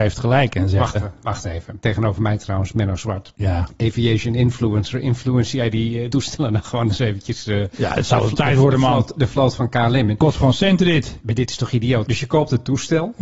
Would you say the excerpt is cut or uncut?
cut